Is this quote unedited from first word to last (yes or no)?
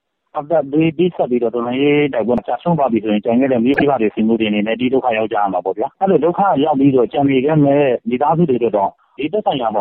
no